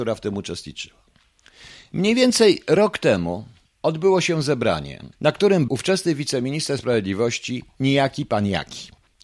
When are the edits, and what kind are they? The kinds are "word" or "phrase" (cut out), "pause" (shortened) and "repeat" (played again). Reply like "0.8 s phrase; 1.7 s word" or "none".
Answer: 3.7 s pause; 5.1 s pause; 5.7 s word

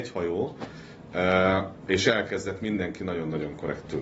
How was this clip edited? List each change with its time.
none

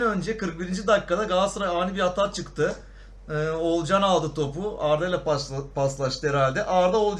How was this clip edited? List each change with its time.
none

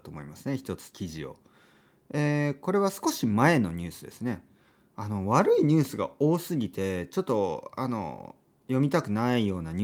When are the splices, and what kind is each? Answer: none

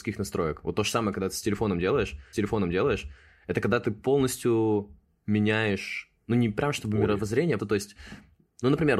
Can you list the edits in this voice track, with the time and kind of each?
2.3 s repeat; 6.2 s word; 7.6 s word

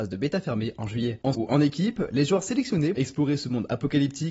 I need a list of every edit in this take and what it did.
1.3 s word; 2.9 s word

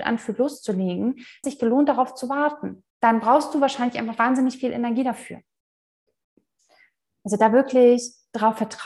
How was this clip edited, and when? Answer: 1.4 s phrase; 2.9 s pause

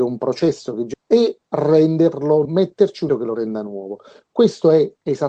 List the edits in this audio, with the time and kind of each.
0.9 s word; 2.4 s word; 3.1 s word

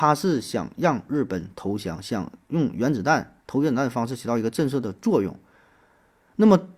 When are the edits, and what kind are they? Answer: none

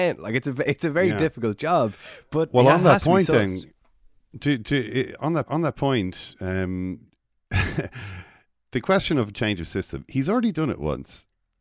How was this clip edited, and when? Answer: 5.5 s repeat

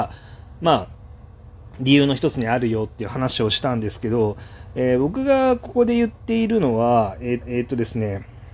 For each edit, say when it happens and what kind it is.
7.4 s repeat

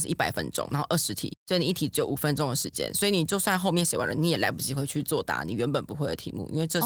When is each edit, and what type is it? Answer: 1.4 s pause

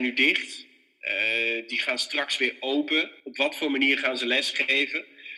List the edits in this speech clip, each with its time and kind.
3.2 s pause

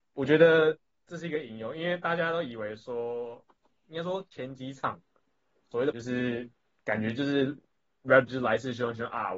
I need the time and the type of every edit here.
5.9 s word; 8.3 s word

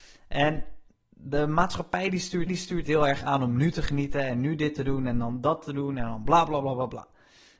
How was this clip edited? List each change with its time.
2.5 s repeat

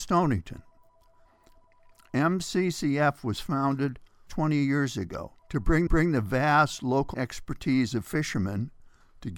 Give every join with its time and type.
4.3 s word; 5.4 s pause; 5.9 s repeat; 7.1 s phrase

